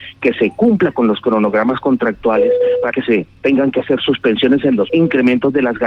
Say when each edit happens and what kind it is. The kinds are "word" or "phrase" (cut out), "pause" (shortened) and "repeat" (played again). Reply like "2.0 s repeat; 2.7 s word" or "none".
2.9 s word; 4.9 s word